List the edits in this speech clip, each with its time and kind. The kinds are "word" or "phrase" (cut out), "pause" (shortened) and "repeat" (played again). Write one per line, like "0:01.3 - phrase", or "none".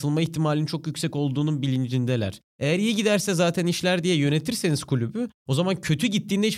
0:05.4 - pause